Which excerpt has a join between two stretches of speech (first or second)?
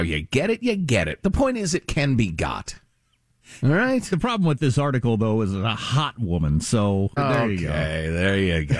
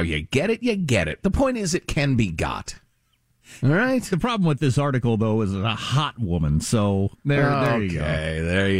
first